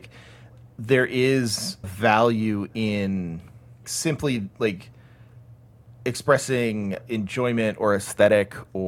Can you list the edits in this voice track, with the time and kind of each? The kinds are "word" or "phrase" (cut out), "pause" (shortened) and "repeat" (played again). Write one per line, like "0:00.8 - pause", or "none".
0:01.8 - word
0:03.8 - word
0:07.0 - word